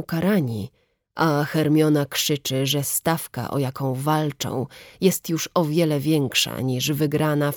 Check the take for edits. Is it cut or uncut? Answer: uncut